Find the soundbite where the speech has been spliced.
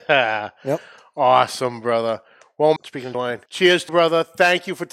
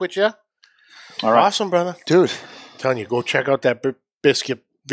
first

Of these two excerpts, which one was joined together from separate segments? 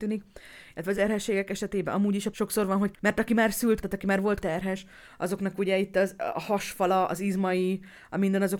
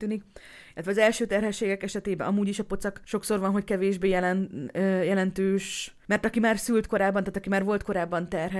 first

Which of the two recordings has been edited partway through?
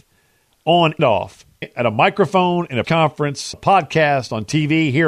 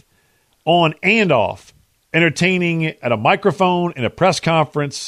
first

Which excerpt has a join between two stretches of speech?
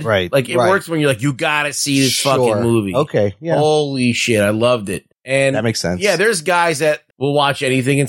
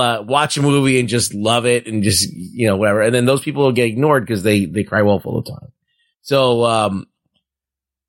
first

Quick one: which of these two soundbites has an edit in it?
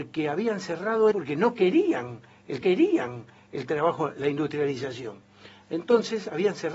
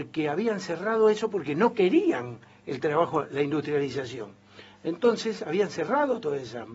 first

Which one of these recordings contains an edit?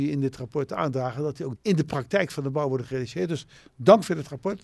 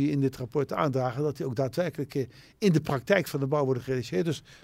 first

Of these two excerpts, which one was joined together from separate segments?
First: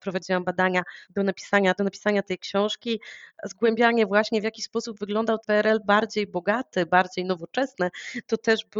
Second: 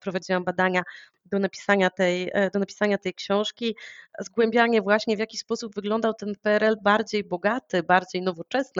first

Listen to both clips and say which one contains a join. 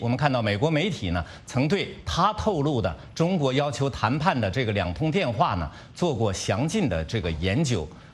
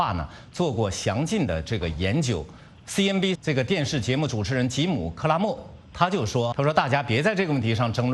second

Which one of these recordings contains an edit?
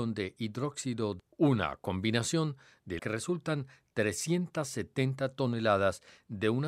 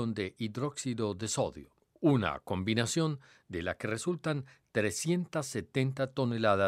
first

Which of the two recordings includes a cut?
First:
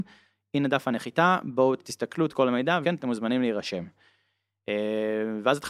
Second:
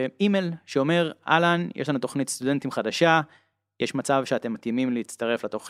first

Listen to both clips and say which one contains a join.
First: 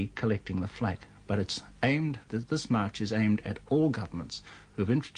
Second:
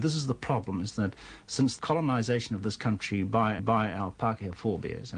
second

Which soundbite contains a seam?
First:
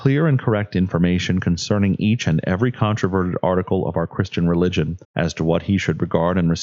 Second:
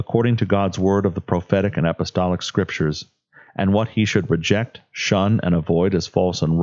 first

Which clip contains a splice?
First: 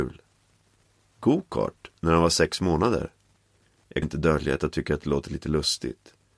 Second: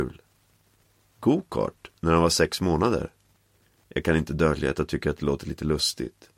first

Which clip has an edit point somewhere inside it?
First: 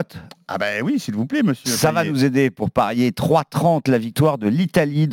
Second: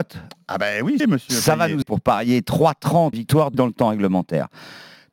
second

